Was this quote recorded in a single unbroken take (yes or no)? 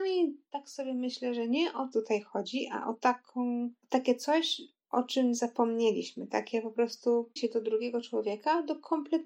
no